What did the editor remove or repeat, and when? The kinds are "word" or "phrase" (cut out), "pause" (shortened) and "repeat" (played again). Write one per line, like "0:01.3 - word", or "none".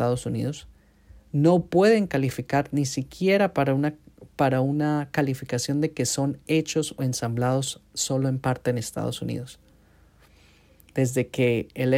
none